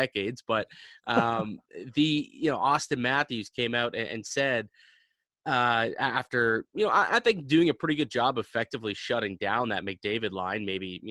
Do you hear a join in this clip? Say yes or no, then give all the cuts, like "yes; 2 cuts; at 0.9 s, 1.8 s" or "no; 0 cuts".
no; 0 cuts